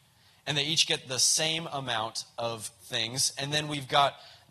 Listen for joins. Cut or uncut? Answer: uncut